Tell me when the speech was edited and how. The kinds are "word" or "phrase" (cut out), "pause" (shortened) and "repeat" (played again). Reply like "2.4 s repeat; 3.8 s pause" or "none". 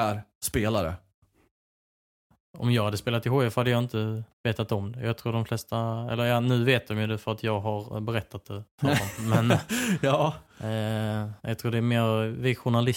4.3 s pause; 11.4 s pause